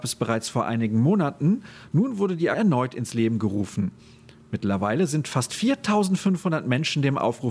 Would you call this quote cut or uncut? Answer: cut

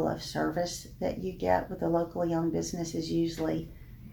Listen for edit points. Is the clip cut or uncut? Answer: uncut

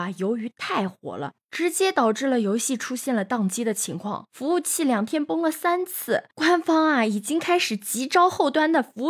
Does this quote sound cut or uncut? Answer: cut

